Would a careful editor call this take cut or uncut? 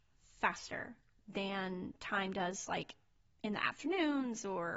uncut